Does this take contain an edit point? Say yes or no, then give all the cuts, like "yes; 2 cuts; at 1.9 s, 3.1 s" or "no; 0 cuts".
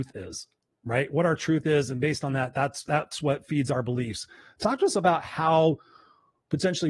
no; 0 cuts